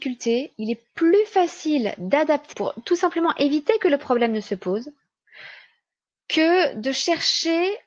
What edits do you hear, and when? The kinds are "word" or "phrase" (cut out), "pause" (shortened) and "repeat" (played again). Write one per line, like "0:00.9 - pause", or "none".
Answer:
0:02.5 - word